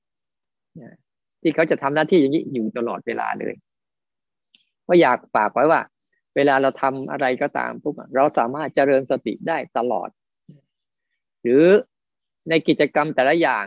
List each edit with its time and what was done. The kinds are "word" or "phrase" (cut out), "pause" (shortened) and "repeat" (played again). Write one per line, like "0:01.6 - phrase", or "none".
none